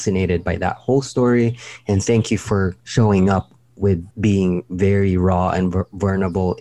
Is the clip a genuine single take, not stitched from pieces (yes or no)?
no